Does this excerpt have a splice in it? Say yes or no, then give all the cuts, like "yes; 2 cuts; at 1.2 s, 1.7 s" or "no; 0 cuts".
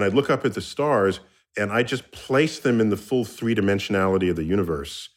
no; 0 cuts